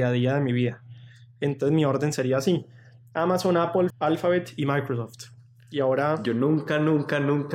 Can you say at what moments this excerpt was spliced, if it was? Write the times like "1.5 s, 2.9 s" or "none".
3.9 s